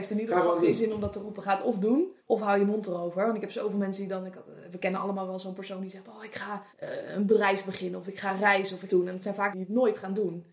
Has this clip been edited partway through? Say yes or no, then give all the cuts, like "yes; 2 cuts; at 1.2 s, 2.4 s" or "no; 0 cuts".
yes; 4 cuts; at 2.2 s, 6.7 s, 8.9 s, 9.5 s